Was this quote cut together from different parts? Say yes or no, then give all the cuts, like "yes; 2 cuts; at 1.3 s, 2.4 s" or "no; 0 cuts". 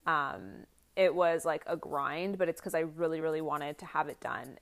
no; 0 cuts